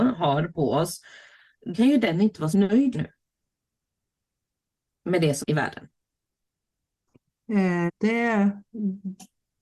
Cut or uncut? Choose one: cut